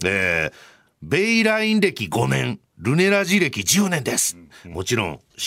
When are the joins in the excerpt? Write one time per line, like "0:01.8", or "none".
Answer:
0:04.5

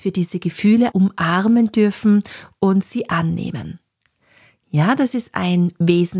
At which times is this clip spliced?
0:00.9

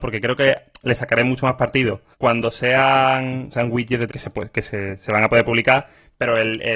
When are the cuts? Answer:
0:02.1
0:03.5
0:04.1

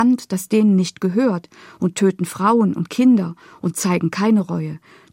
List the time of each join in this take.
none

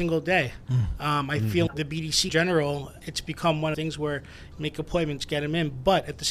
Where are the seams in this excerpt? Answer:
0:01.7
0:02.3
0:03.0
0:03.7
0:04.5

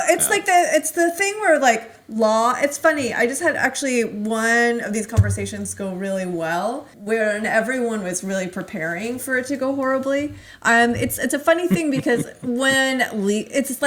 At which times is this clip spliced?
0:06.9

